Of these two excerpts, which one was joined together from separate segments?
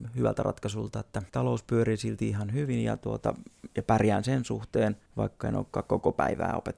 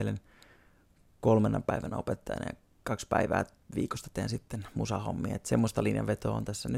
first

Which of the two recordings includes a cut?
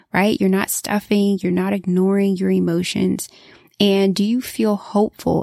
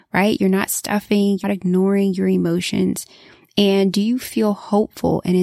second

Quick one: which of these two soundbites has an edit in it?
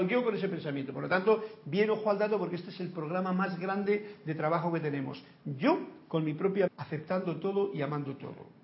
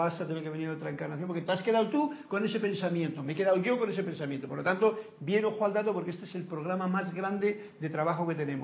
first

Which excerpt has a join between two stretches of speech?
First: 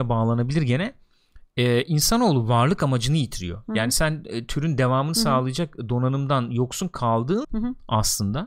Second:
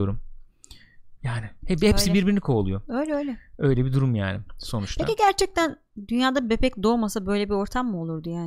first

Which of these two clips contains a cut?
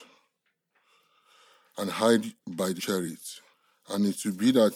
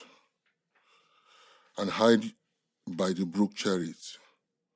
first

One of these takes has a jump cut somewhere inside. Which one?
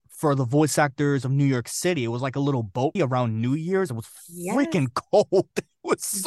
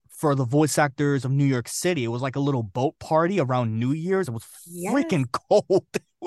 first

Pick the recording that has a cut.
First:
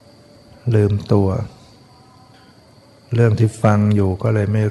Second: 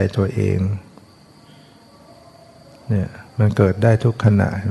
second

